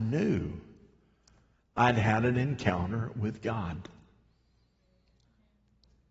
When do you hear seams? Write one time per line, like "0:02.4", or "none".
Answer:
none